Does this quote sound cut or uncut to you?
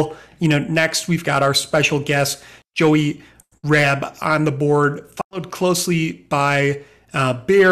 uncut